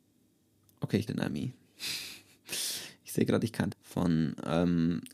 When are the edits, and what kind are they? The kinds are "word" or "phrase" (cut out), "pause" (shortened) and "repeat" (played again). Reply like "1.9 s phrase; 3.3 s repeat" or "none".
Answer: 1.1 s word; 3.7 s word